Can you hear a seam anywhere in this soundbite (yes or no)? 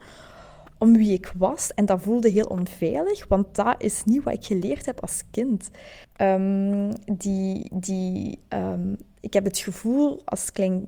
yes